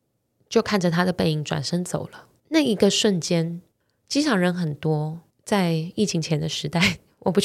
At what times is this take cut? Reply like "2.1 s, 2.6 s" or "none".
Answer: 2.4 s, 3.7 s, 5.3 s